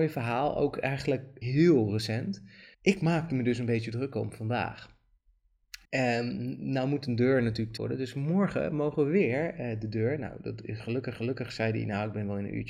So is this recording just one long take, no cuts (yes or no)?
no